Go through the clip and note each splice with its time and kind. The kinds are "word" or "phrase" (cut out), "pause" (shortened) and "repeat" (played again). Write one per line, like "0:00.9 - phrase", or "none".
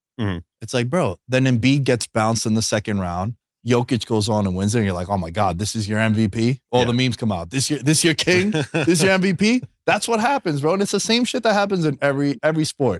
none